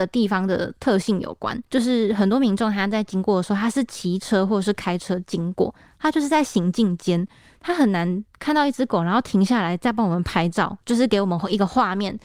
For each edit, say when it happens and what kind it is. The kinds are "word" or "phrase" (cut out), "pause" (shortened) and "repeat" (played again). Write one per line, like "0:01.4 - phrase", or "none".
0:01.7 - pause
0:10.8 - pause